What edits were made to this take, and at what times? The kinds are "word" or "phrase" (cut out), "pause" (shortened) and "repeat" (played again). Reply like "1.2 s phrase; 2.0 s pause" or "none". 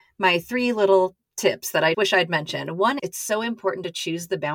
1.9 s word; 3.0 s word